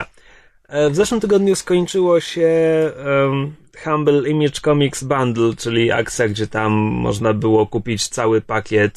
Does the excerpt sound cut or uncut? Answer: uncut